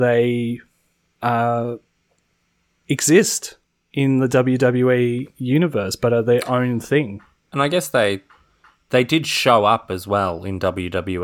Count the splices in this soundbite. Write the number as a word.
zero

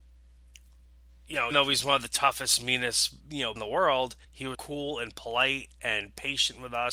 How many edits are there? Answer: five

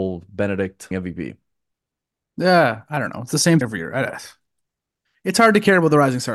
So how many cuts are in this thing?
two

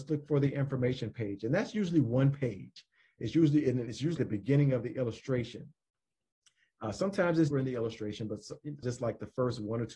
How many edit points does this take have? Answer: three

